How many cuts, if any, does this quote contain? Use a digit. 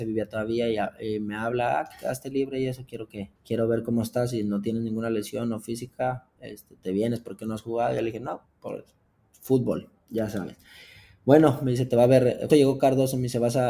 3